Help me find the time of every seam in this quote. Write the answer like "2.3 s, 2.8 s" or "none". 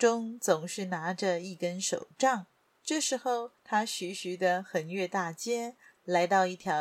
none